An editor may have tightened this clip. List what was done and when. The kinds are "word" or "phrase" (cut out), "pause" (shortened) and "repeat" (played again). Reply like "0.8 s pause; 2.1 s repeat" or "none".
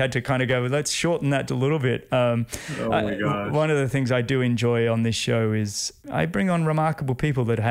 1.5 s word